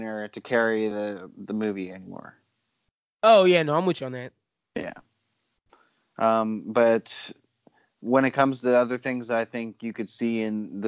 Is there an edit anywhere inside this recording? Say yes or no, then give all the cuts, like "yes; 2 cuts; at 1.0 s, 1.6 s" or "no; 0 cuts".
no; 0 cuts